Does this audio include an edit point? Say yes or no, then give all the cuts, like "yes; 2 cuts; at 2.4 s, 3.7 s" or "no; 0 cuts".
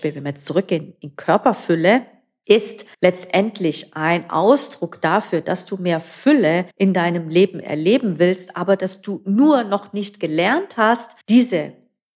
yes; 3 cuts; at 2.9 s, 6.7 s, 11.2 s